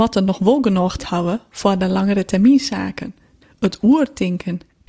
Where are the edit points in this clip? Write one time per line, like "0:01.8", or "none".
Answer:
0:01.0
0:03.4